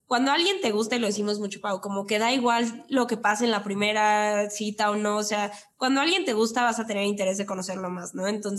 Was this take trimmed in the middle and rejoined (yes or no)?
no